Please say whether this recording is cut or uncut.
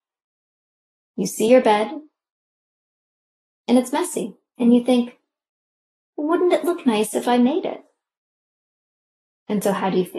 uncut